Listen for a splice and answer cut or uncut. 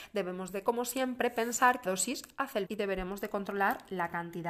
cut